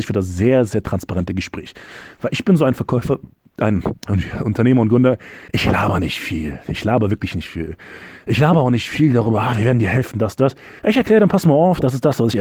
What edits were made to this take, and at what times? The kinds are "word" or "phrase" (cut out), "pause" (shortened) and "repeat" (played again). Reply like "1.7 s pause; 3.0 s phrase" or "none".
4.0 s pause; 5.5 s pause; 10.8 s pause